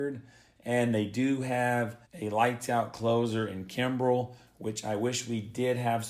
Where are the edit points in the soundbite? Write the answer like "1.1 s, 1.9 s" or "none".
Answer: 2.0 s

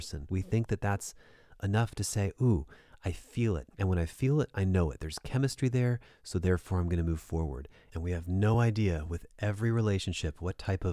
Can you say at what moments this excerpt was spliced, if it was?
none

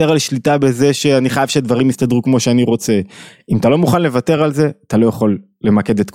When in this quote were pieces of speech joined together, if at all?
none

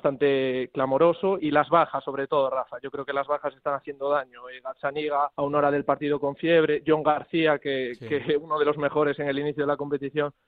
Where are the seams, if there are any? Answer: 1.4 s, 5.3 s

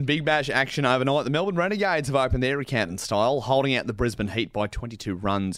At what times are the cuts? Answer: none

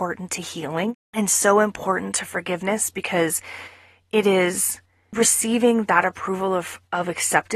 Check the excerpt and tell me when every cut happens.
1.0 s

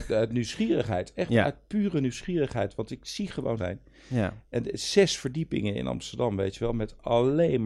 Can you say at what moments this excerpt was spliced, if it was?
3.6 s

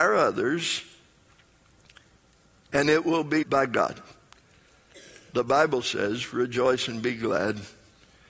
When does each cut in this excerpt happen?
3.4 s

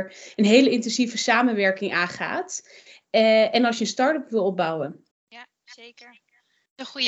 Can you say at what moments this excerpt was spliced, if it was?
5.1 s

